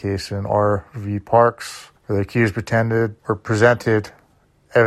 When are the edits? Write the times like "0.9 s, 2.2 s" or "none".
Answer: 2.0 s, 3.2 s